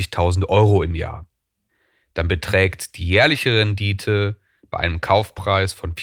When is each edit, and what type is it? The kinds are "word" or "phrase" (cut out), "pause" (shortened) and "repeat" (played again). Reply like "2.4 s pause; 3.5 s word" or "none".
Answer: none